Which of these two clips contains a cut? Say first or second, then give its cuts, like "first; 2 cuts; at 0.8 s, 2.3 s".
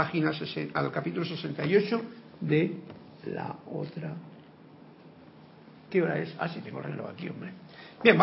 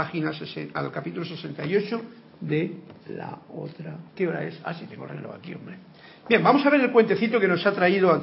second; 2 cuts; at 3.0 s, 4.1 s